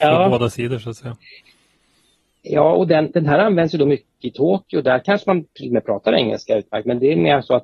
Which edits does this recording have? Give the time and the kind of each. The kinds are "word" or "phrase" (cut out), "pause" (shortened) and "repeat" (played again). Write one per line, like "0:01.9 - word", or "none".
none